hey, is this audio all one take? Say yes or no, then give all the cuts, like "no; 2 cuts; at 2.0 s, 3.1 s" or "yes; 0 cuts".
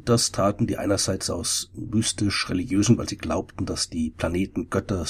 no; 1 cut; at 3.0 s